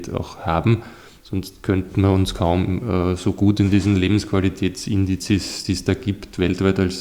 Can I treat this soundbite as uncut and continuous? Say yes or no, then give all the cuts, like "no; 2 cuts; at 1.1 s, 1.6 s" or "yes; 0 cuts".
yes; 0 cuts